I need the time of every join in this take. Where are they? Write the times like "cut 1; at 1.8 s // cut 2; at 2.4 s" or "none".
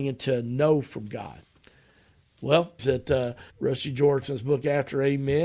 cut 1; at 2.8 s // cut 2; at 3.5 s // cut 3; at 4.2 s